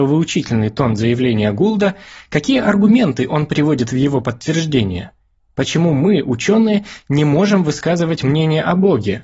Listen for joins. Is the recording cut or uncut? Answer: uncut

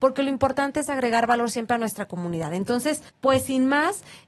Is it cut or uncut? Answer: cut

